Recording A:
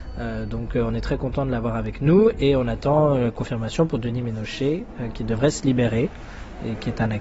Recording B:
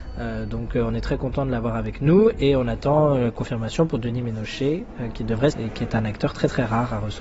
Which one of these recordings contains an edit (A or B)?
B